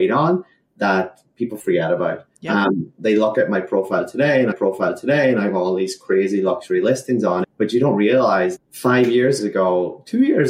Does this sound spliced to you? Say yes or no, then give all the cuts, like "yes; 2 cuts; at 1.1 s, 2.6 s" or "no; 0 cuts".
yes; 5 cuts; at 2.3 s, 4.5 s, 7.4 s, 8.6 s, 9.4 s